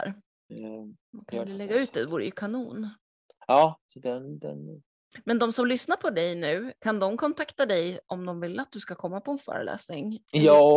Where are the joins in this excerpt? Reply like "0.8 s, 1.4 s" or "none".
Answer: 3.8 s